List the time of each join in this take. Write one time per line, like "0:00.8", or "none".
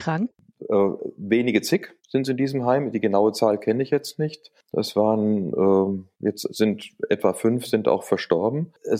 0:02.0
0:06.1